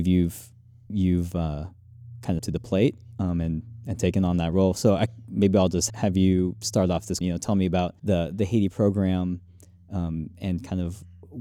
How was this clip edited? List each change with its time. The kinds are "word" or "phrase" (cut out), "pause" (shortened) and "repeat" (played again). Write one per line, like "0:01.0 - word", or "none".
0:02.4 - phrase
0:05.9 - word
0:07.2 - word
0:08.0 - pause